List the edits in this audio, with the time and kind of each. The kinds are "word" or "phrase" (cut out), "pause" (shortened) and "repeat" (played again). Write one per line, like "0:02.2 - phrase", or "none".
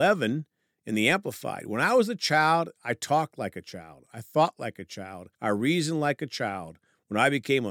0:05.3 - pause